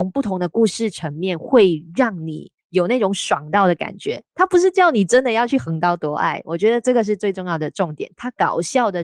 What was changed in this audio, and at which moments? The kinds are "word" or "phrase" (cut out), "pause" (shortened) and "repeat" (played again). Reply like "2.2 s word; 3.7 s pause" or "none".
2.6 s pause